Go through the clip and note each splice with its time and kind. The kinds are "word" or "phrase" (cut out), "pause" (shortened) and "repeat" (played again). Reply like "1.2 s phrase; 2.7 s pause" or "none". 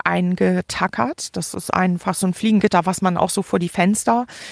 none